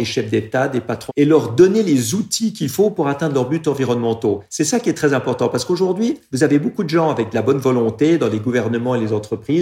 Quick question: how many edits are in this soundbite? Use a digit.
1